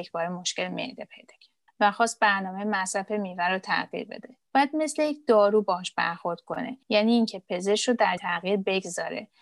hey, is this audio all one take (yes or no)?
no